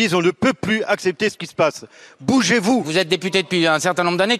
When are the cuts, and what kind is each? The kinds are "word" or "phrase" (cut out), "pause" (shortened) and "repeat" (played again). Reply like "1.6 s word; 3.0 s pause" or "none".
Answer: none